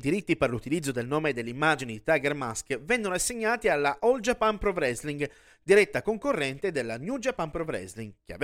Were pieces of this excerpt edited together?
no; 0 cuts

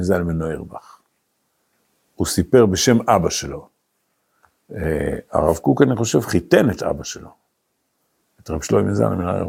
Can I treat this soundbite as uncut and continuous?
yes; 0 cuts

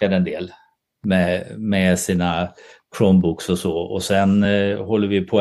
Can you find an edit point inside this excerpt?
no; 0 cuts

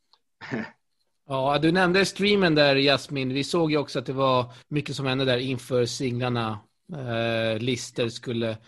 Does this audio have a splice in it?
yes; 1 cut; at 4.6 s

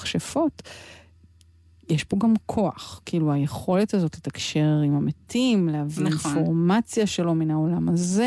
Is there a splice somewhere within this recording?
no; 0 cuts

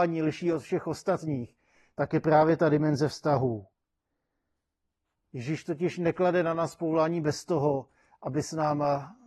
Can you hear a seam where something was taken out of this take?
no; 0 cuts

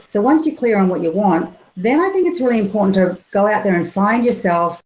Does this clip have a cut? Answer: no; 0 cuts

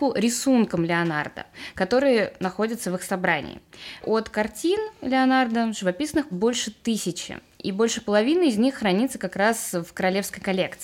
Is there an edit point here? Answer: yes; 2 cuts; at 4.0 s, 6.3 s

